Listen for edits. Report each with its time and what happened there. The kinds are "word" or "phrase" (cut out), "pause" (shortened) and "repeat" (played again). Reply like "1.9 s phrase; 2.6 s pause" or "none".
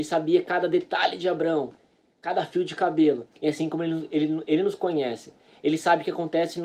3.3 s pause